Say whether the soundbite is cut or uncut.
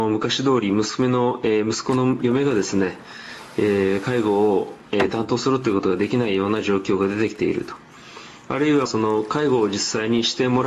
cut